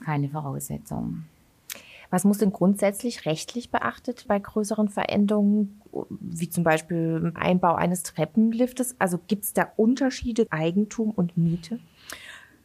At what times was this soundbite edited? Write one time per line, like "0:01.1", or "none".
0:04.3
0:07.4
0:10.5